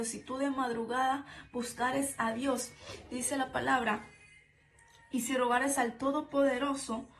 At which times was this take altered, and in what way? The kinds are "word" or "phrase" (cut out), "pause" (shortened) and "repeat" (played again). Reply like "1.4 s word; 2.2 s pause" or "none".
none